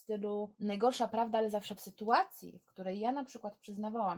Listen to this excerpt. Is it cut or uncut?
cut